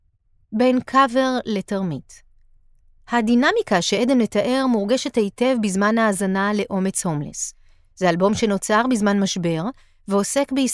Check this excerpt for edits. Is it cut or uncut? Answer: uncut